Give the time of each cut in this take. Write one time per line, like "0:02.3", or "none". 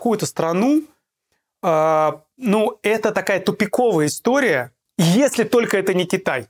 none